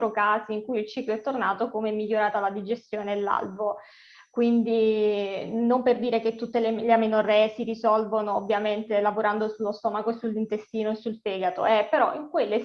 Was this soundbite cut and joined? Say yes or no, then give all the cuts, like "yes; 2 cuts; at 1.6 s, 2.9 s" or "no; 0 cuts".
no; 0 cuts